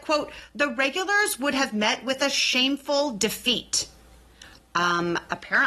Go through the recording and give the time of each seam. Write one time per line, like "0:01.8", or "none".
none